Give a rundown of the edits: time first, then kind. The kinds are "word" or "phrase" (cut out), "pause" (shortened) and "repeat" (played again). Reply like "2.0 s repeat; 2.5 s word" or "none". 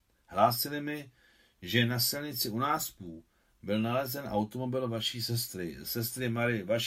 none